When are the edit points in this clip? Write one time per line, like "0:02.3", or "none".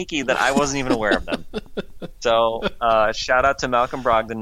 none